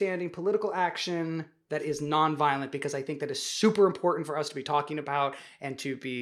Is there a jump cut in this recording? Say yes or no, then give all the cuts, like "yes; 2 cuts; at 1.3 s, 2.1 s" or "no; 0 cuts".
no; 0 cuts